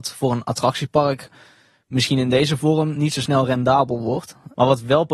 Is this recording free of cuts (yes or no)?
yes